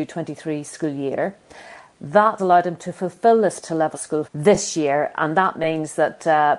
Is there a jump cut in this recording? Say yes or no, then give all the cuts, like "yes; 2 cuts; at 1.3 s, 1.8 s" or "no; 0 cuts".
yes; 4 cuts; at 2.4 s, 3.6 s, 3.9 s, 4.2 s